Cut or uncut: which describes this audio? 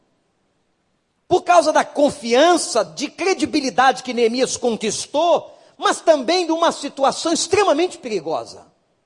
uncut